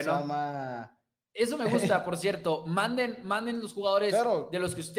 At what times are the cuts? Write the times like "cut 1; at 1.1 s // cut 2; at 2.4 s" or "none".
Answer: none